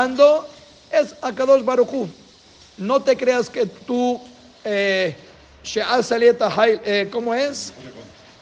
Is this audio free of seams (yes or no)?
yes